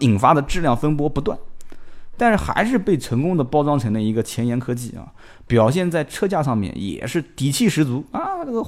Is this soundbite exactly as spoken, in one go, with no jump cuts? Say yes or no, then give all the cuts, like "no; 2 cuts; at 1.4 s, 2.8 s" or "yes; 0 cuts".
yes; 0 cuts